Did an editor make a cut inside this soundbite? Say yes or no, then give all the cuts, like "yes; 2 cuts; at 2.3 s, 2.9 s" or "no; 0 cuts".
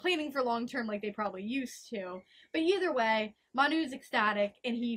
no; 0 cuts